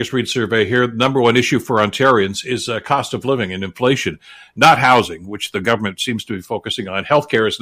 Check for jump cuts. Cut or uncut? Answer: uncut